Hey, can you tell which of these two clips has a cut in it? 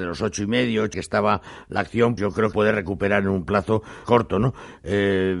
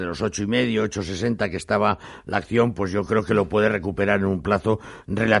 first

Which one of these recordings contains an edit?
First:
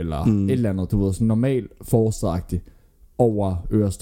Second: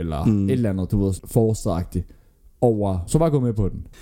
second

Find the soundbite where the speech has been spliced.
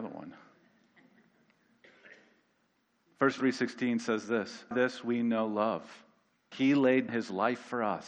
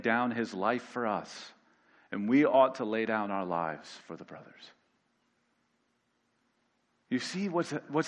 first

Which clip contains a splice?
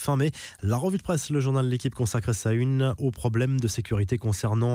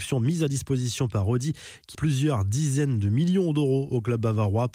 second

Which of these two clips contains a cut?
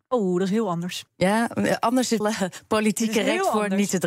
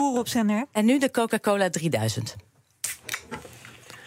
first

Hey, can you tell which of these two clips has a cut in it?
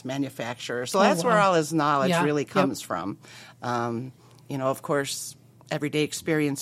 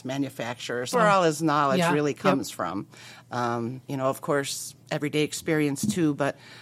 second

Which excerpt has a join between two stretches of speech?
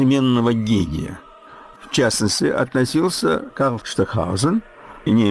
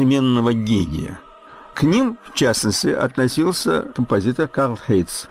first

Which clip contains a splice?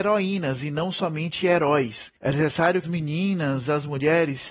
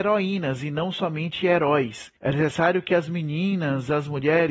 first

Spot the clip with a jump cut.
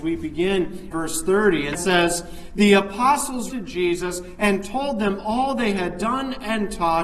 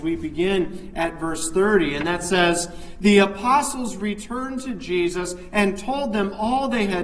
first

